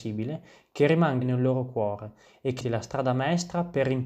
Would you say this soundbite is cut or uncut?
cut